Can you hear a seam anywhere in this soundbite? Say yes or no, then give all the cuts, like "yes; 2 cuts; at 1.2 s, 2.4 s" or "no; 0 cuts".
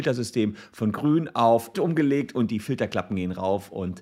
yes; 1 cut; at 1.7 s